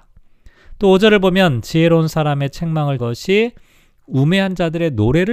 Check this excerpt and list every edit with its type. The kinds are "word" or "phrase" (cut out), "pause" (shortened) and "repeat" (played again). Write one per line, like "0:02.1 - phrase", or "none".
0:03.0 - word

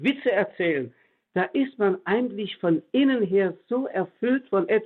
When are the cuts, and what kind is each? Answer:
none

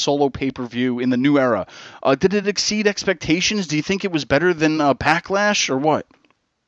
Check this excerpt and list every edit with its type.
none

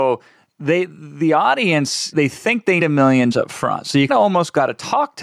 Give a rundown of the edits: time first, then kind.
0:02.1 - word
0:02.8 - word
0:03.3 - word
0:04.1 - word

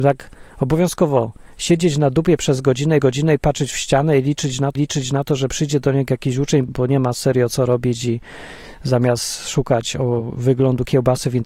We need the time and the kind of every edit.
0:03.0 - repeat
0:04.8 - repeat
0:06.7 - word

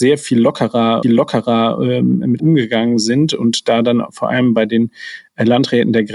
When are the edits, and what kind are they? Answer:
0:01.0 - repeat
0:02.4 - word

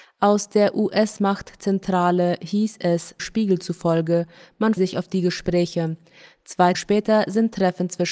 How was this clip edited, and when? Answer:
0:03.2 - word
0:04.8 - word
0:06.7 - word

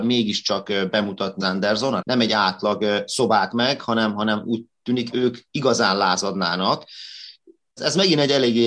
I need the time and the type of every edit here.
0:01.4 - word
0:02.0 - word
0:03.5 - word
0:05.1 - word

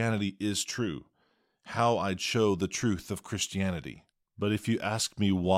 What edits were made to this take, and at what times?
0:04.1 - pause

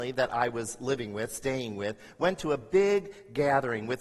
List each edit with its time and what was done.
none

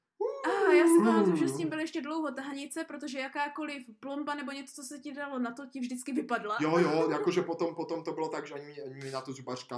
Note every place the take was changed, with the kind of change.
none

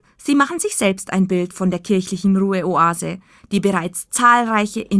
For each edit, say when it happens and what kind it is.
none

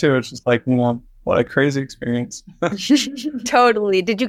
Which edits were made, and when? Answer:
none

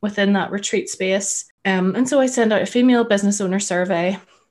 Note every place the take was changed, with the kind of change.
0:01.5 - pause

